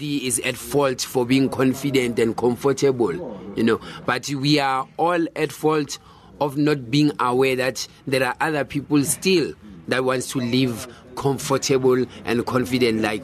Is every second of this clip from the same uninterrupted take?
yes; 0 cuts

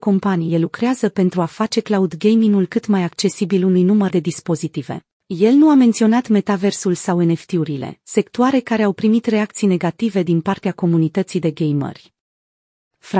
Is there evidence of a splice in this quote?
yes; 2 cuts; at 4.1 s, 5.1 s

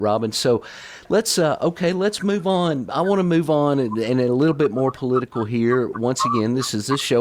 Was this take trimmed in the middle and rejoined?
no; 0 cuts

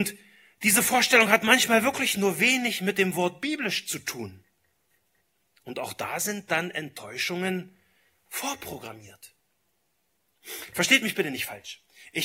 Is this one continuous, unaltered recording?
yes; 0 cuts

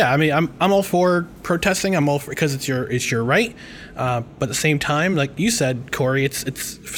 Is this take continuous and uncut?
yes; 0 cuts

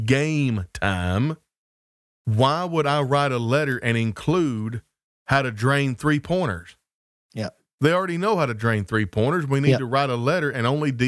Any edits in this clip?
no; 0 cuts

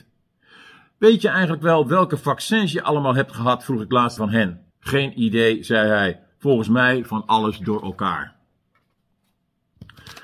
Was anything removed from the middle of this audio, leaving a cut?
yes; 2 cuts; at 4.2 s, 4.7 s

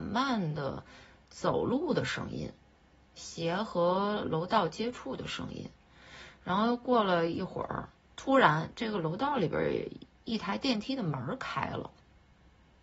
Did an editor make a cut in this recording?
yes; 1 cut; at 7.9 s

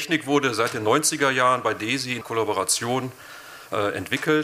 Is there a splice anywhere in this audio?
yes; 1 cut; at 2.2 s

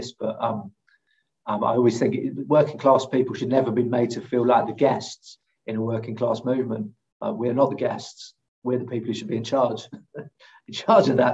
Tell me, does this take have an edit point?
no; 0 cuts

